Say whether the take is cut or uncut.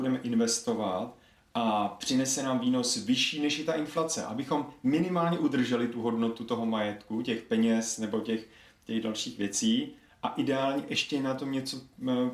uncut